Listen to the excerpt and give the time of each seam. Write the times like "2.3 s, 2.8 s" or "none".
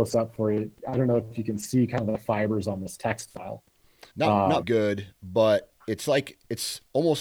4.1 s, 4.6 s, 5.8 s